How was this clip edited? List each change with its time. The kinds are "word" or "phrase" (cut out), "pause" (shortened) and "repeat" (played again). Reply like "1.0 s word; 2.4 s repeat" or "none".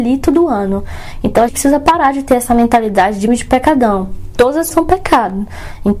1.5 s word; 3.3 s word; 4.7 s word